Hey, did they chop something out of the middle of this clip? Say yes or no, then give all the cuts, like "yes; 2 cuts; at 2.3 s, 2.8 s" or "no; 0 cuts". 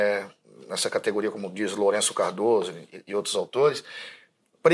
no; 0 cuts